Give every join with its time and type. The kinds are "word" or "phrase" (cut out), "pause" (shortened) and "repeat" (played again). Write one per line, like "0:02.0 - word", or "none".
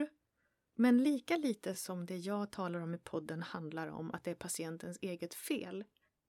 none